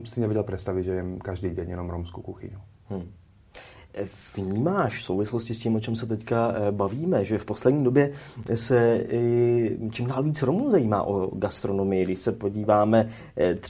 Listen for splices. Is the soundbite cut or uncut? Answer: uncut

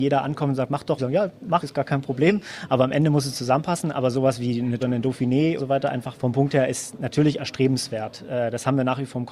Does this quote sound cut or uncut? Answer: cut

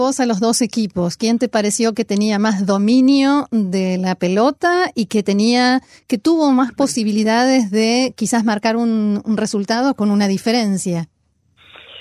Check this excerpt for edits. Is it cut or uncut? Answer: uncut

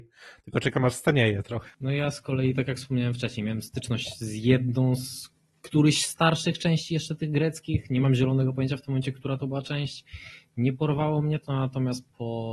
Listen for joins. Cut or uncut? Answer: uncut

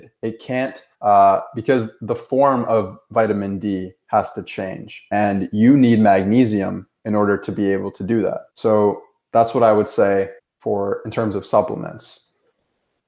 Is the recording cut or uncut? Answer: cut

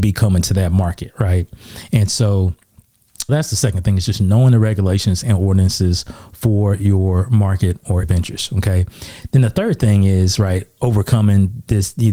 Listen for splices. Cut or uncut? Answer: cut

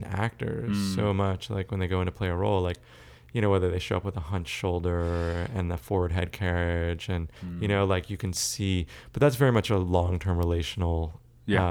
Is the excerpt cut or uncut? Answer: cut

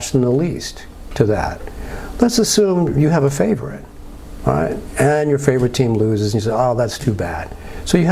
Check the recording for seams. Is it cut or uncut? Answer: uncut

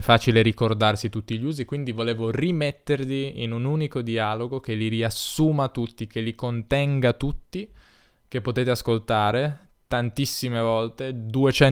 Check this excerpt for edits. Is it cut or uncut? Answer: uncut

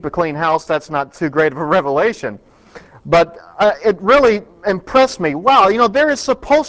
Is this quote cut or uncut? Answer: uncut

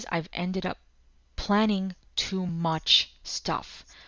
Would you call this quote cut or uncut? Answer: uncut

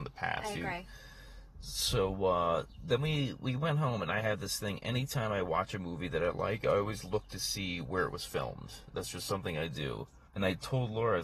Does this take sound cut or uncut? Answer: cut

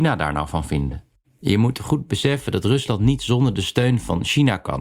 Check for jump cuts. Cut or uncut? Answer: uncut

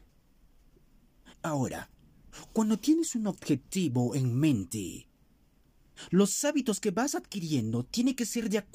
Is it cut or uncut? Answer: cut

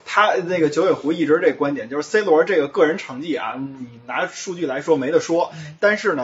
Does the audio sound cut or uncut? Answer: uncut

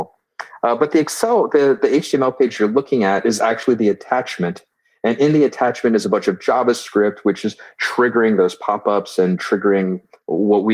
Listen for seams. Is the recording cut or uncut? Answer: uncut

